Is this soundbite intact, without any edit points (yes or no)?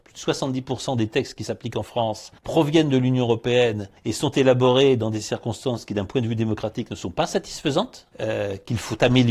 no